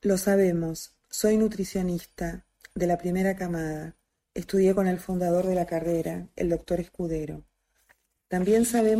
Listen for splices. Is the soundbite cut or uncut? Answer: uncut